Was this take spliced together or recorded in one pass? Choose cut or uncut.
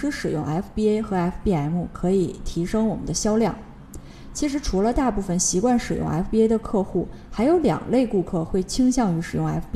uncut